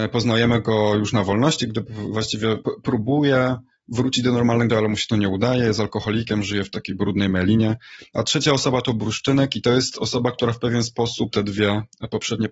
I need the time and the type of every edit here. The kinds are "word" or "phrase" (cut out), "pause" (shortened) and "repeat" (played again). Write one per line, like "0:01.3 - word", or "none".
0:04.7 - word
0:11.3 - word